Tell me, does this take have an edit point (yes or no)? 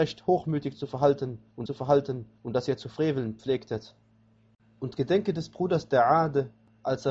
yes